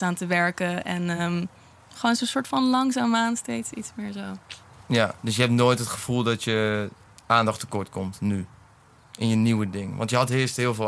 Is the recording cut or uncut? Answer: uncut